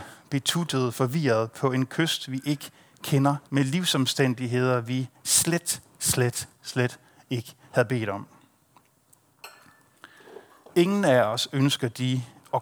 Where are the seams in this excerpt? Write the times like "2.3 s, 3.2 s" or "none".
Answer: 3.5 s